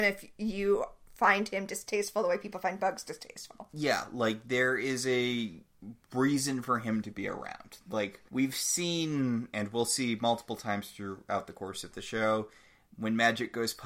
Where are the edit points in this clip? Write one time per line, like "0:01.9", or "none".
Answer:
0:08.3

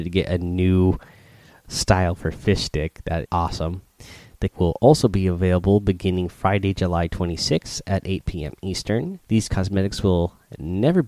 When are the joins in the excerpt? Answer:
0:01.6
0:03.2
0:04.5
0:09.2

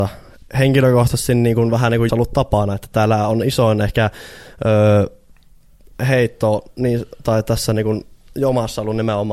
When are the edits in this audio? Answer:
0:02.1

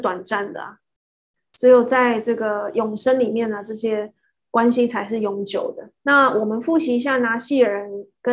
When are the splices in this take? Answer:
0:06.0

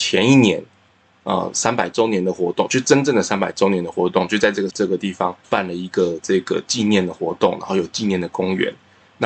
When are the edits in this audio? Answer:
0:04.7
0:05.4

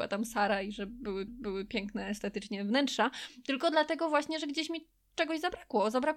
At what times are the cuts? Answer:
0:01.3

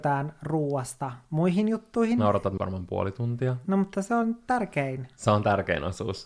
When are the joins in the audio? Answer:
0:02.6

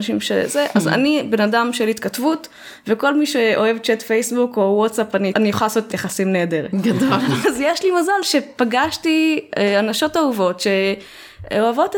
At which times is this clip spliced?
0:05.3
0:05.9
0:07.4

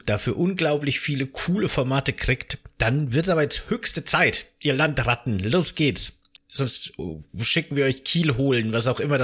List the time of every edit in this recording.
none

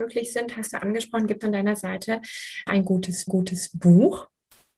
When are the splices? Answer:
0:01.4
0:02.7
0:03.3

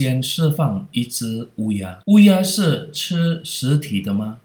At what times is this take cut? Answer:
0:02.0

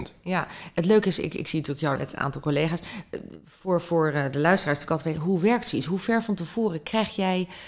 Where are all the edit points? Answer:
0:02.0

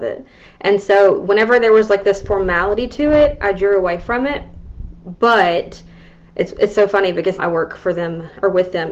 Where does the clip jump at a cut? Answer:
0:07.4

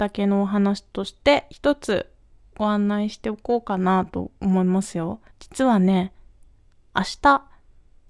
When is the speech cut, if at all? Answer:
0:05.3

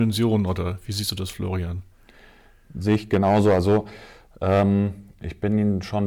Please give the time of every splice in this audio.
none

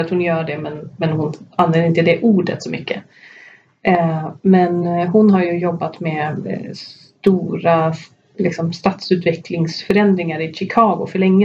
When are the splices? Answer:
none

